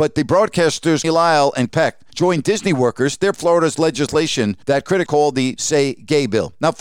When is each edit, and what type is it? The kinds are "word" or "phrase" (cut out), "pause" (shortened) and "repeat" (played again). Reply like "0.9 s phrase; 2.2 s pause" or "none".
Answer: 1.0 s word; 1.7 s word; 2.1 s pause; 3.3 s word; 4.6 s pause; 5.1 s word; 5.6 s word